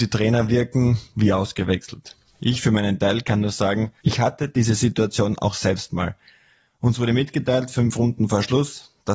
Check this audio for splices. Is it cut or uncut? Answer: uncut